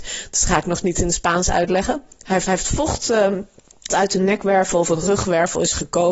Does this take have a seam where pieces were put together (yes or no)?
yes